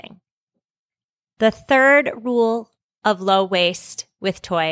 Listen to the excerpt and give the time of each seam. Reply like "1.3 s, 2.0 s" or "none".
none